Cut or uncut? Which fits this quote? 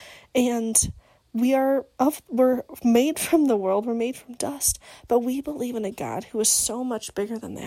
uncut